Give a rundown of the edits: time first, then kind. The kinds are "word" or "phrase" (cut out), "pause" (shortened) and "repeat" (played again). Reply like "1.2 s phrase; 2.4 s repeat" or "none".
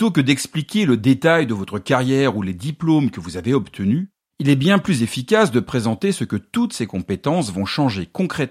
none